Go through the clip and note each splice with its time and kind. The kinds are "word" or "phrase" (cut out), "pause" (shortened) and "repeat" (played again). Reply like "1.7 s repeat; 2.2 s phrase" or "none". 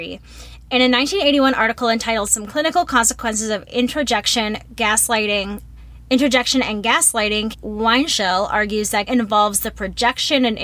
7.5 s word; 9.1 s word